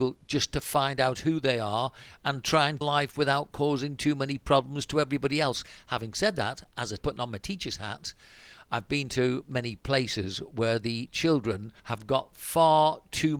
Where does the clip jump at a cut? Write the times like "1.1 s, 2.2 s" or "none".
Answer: 2.8 s, 7.0 s, 9.4 s, 11.8 s